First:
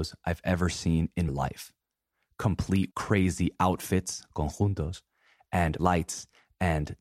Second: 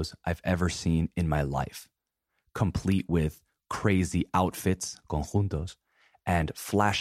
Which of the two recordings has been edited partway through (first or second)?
first